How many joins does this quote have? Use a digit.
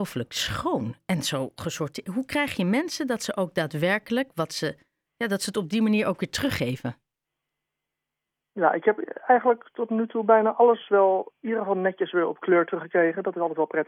0